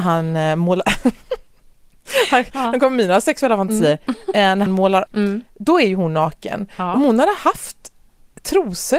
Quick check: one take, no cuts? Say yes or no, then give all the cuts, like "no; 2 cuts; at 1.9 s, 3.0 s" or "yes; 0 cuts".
no; 2 cuts; at 4.7 s, 5.1 s